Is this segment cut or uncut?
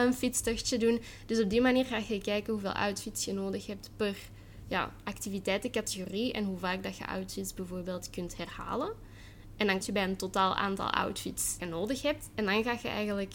cut